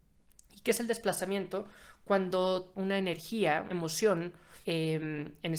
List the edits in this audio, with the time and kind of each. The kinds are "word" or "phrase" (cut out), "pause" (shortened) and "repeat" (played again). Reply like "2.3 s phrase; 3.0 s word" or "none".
2.7 s word; 3.7 s word; 4.6 s pause